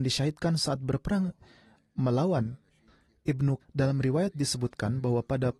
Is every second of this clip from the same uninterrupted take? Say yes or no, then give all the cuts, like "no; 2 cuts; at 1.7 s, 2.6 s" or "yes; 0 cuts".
no; 1 cut; at 3.6 s